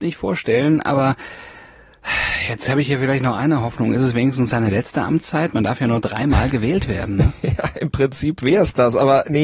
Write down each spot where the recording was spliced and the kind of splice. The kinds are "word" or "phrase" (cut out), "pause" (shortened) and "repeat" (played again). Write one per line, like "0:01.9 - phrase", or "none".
none